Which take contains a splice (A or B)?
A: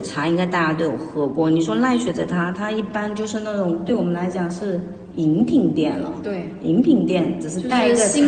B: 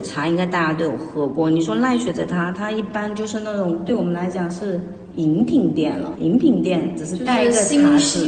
B